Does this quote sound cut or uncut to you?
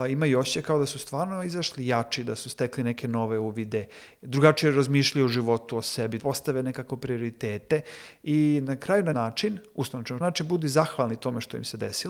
cut